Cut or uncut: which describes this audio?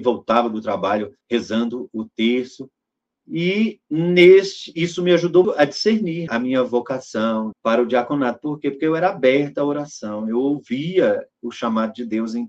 cut